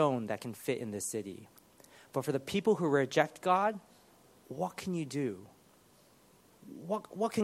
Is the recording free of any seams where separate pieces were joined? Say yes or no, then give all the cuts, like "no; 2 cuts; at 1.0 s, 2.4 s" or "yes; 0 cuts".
yes; 0 cuts